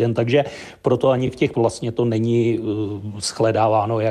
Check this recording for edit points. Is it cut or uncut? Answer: cut